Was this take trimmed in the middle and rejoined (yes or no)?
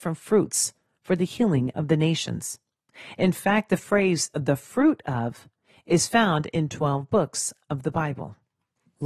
no